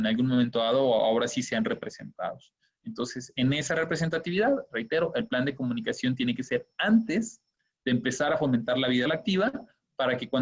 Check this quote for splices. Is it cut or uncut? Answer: cut